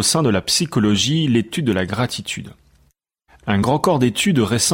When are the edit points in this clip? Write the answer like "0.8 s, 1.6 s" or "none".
none